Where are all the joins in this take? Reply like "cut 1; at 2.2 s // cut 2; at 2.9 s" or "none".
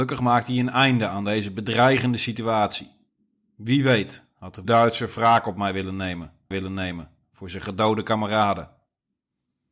cut 1; at 3.1 s // cut 2; at 4.6 s // cut 3; at 6.5 s